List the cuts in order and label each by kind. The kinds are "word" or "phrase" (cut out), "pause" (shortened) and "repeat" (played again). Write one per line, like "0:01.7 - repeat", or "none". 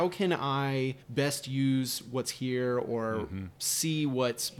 0:01.0 - pause